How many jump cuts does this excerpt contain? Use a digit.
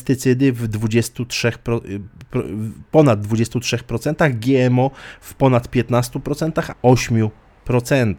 1